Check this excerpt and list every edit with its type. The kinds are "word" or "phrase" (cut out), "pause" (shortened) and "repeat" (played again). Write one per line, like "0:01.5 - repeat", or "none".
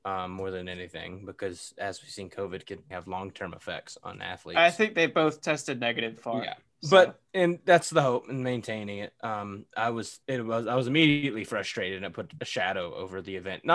0:02.9 - word
0:06.2 - word
0:07.3 - pause
0:10.2 - pause
0:12.4 - word